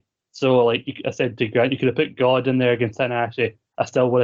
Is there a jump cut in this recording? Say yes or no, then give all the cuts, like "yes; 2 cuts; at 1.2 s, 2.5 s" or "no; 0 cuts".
no; 0 cuts